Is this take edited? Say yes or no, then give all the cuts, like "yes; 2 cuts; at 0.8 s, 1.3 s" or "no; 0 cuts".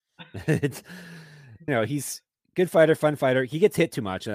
yes; 1 cut; at 1.7 s